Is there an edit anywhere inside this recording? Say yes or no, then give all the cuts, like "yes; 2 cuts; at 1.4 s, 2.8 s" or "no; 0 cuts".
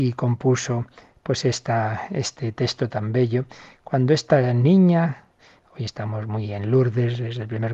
no; 0 cuts